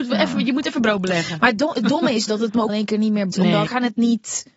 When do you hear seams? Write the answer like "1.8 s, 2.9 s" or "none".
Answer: 2.3 s, 2.7 s, 3.3 s, 3.7 s